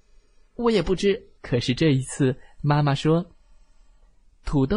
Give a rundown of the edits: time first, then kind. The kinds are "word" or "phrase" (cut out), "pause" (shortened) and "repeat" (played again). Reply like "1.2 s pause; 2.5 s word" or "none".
1.4 s pause